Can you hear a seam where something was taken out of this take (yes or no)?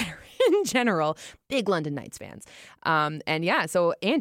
no